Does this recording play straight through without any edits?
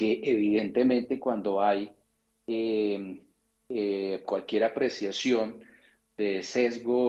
yes; 0 cuts

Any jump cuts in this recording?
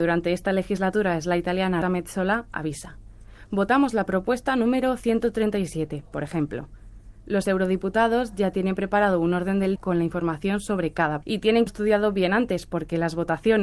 yes; 4 cuts; at 1.8 s, 9.8 s, 11.2 s, 11.7 s

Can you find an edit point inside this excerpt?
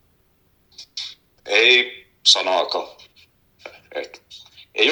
no; 0 cuts

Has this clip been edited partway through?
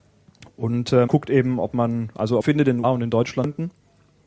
yes; 3 cuts; at 1.1 s, 2.4 s, 2.8 s

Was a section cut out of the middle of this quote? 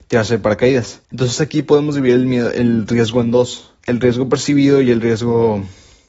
yes; 2 cuts; at 1.0 s, 3.8 s

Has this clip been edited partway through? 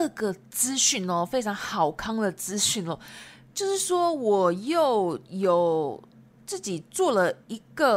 no; 0 cuts

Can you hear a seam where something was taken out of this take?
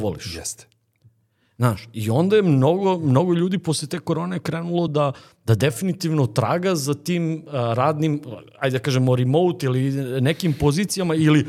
no; 0 cuts

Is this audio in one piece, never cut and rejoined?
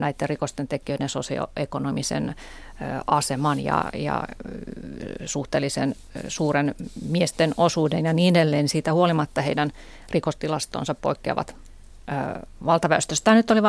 yes; 0 cuts

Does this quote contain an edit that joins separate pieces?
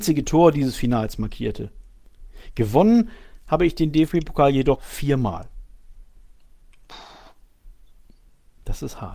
yes; 1 cut; at 4.8 s

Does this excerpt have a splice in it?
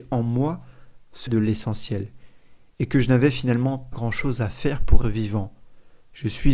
yes; 3 cuts; at 1.3 s, 3.9 s, 5.0 s

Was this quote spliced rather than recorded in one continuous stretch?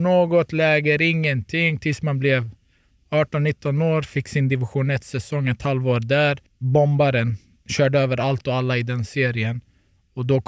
yes; 1 cut; at 6.5 s

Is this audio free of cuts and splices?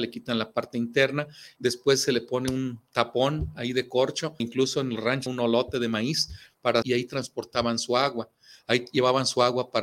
no; 4 cuts; at 1.6 s, 4.4 s, 5.3 s, 6.8 s

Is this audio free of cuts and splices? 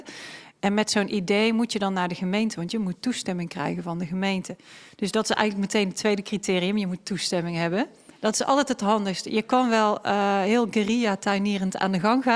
yes; 0 cuts

